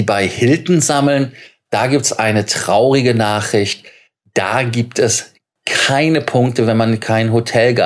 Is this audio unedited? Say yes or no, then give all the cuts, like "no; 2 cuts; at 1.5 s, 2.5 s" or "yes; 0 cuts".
yes; 0 cuts